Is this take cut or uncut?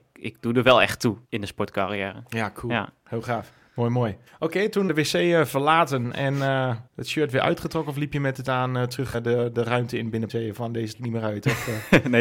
cut